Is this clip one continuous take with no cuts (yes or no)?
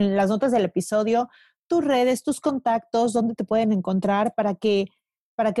yes